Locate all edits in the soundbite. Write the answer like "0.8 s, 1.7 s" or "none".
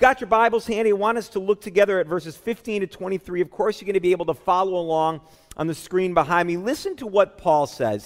none